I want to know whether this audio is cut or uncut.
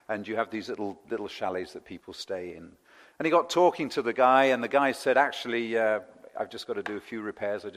uncut